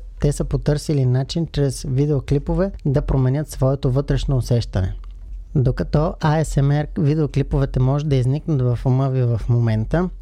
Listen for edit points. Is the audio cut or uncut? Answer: uncut